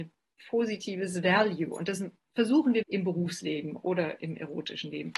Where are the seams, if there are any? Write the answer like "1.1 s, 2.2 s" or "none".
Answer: 2.8 s